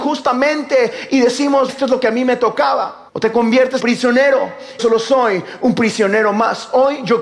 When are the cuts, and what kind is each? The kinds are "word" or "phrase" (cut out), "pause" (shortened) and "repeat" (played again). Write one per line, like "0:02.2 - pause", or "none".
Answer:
0:01.7 - word
0:03.1 - pause
0:03.8 - word
0:04.8 - phrase